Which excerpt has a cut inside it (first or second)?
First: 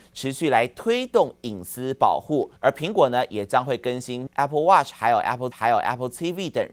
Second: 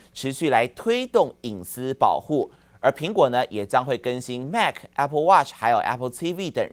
first